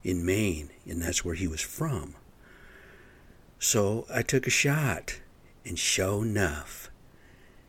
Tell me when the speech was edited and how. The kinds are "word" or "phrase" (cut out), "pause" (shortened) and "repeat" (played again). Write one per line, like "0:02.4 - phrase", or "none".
none